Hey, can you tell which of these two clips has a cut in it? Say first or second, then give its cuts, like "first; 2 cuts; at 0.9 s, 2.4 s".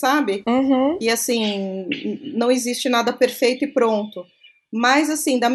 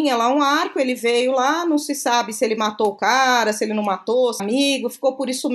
second; 1 cut; at 4.4 s